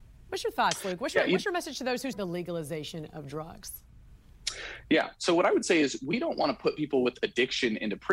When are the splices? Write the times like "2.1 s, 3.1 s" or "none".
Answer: 2.1 s